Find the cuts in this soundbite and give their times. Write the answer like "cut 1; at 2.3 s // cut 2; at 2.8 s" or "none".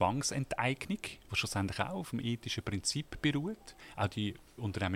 none